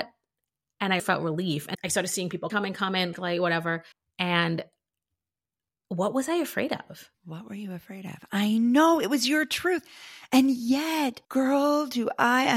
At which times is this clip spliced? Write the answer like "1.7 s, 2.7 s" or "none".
1.0 s, 1.7 s, 2.5 s, 3.1 s, 3.9 s, 7.1 s, 11.2 s